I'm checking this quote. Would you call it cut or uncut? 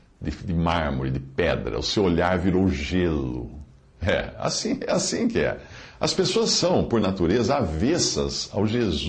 uncut